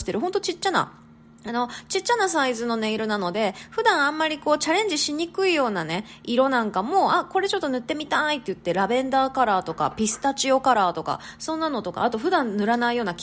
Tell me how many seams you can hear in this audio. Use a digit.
0